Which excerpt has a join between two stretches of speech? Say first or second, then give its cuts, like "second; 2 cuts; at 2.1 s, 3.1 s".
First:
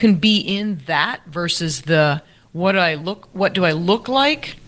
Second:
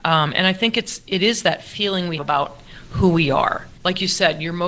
second; 2 cuts; at 2.2 s, 3.8 s